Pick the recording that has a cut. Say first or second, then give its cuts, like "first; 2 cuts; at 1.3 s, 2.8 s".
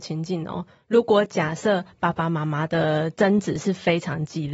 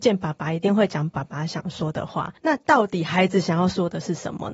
second; 1 cut; at 2.4 s